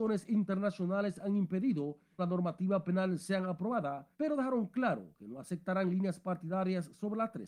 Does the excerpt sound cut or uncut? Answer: cut